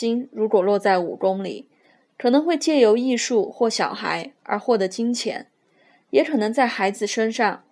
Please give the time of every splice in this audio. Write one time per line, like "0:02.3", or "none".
none